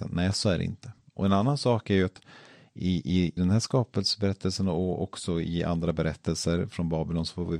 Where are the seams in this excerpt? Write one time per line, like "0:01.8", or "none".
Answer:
0:03.4